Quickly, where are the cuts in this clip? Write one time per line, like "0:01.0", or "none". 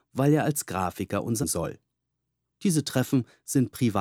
0:01.4